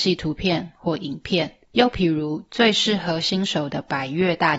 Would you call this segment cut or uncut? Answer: cut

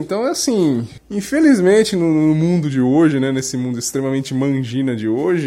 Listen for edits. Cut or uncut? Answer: uncut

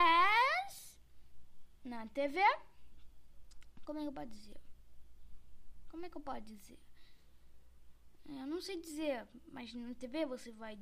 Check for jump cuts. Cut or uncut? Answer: uncut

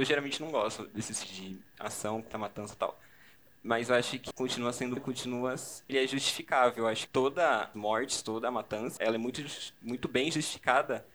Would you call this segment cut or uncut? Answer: cut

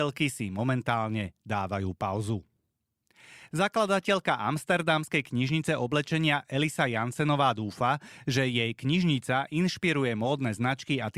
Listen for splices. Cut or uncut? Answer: uncut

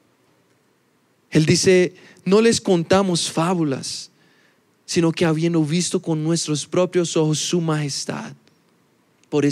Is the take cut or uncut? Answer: uncut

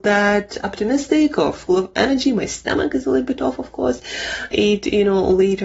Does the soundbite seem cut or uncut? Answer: cut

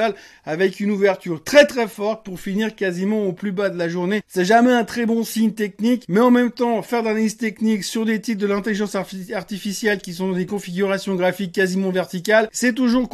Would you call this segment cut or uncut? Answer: uncut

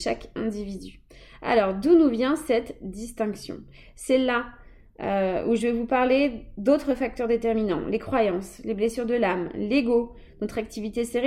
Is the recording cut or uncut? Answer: uncut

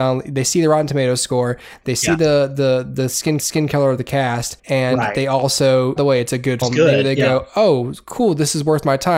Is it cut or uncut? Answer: cut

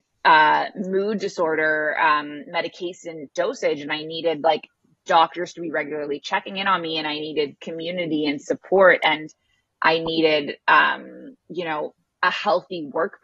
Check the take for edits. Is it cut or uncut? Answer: uncut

